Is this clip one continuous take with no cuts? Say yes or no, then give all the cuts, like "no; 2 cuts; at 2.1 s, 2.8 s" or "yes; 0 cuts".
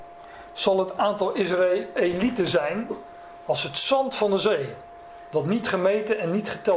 yes; 0 cuts